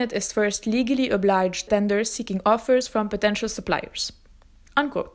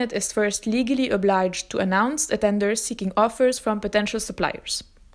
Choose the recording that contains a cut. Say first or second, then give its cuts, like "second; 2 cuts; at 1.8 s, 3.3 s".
first; 1 cut; at 1.7 s